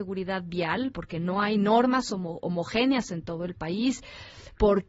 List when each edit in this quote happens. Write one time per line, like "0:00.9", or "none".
0:00.9